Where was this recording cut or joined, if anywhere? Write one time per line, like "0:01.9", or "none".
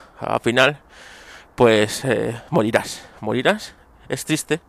none